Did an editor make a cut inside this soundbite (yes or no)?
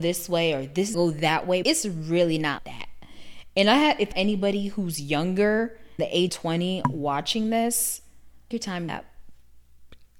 yes